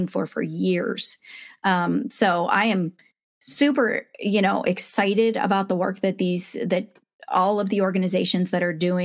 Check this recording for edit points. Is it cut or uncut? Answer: uncut